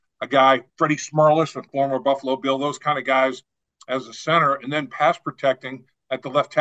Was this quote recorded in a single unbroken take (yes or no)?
yes